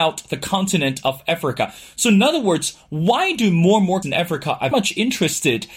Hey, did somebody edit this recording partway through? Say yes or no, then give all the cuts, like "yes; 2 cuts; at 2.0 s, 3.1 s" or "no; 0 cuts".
yes; 2 cuts; at 4.0 s, 4.7 s